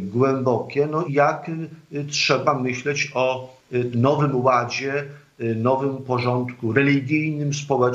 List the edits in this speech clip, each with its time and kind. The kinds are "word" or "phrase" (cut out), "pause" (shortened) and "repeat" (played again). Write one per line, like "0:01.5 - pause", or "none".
0:01.1 - word
0:03.9 - word